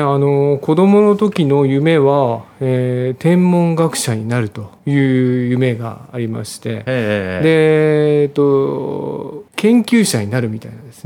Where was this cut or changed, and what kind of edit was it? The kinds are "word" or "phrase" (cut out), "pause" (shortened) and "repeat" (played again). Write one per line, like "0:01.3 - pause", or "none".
0:04.8 - pause
0:09.5 - pause